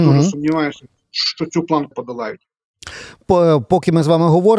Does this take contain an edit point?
yes; 1 cut; at 1.9 s

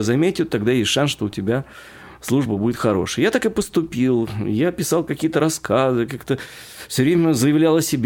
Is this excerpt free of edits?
yes; 0 cuts

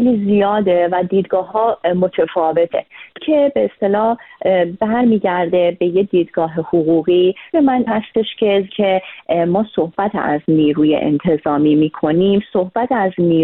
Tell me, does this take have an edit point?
yes; 4 cuts; at 3.2 s, 7.5 s, 7.9 s, 8.7 s

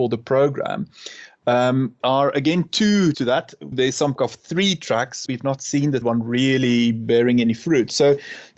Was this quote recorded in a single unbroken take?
no; 6 cuts; at 2.0 s, 3.1 s, 3.7 s, 4.2 s, 5.3 s, 6.0 s

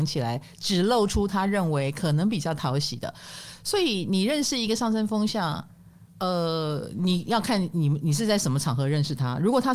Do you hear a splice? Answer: no; 0 cuts

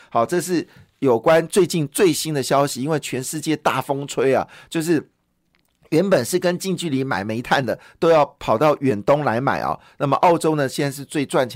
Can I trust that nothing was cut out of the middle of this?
yes; 0 cuts

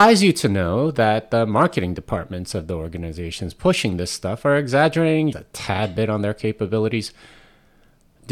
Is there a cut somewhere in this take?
yes; 1 cut; at 5.3 s

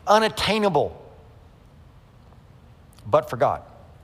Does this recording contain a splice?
no; 0 cuts

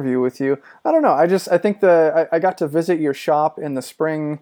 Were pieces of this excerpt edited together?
no; 0 cuts

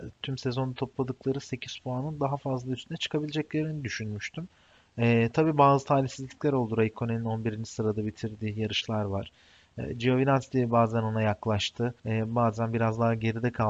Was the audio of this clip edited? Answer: yes; 1 cut; at 12.0 s

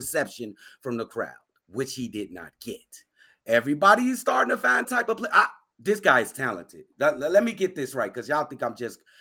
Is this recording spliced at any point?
yes; 1 cut; at 4.8 s

